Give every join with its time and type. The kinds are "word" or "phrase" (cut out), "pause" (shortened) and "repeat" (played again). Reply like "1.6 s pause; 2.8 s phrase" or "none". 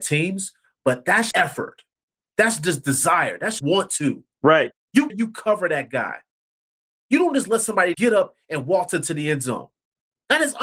1.3 s word; 3.6 s word; 5.1 s phrase; 7.9 s word